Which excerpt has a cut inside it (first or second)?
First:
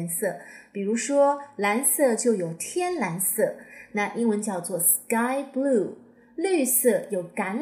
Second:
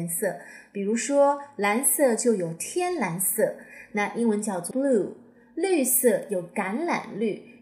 second